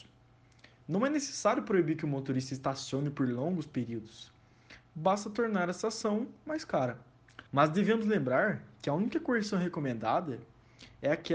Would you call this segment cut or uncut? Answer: cut